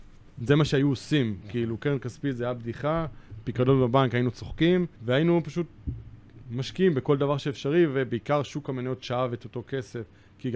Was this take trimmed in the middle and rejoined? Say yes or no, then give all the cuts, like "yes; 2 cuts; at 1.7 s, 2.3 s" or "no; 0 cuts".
yes; 1 cut; at 4.9 s